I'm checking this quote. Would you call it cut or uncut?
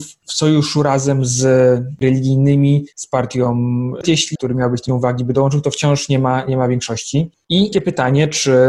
cut